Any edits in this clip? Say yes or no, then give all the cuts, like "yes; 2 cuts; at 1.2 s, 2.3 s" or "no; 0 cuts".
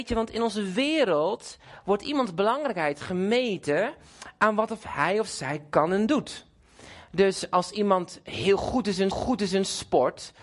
yes; 1 cut; at 9.1 s